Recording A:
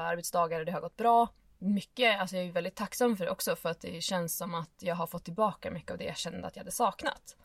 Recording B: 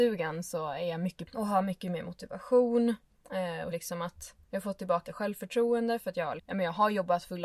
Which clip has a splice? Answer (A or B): B